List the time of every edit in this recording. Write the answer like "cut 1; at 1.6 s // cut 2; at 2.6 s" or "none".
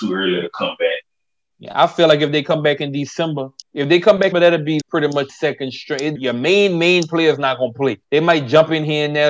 cut 1; at 3.6 s // cut 2; at 4.3 s // cut 3; at 4.8 s // cut 4; at 5.3 s // cut 5; at 6.2 s // cut 6; at 8.0 s